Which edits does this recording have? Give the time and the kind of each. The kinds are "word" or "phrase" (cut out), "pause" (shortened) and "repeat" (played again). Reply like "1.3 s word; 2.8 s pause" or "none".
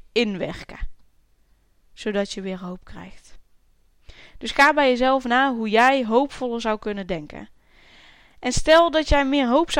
none